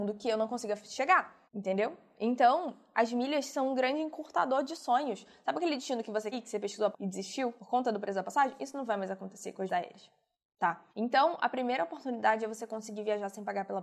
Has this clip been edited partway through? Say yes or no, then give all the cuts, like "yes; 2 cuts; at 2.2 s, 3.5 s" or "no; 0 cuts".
yes; 6 cuts; at 1.5 s, 6.3 s, 6.9 s, 7.6 s, 9.7 s, 10.9 s